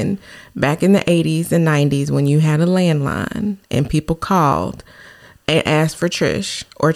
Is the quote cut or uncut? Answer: uncut